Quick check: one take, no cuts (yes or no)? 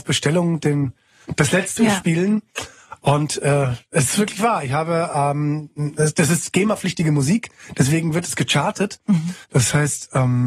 no